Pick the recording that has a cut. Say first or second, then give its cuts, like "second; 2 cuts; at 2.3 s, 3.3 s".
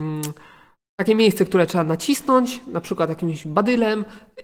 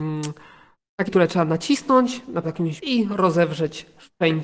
second; 3 cuts; at 1.1 s, 2.4 s, 2.8 s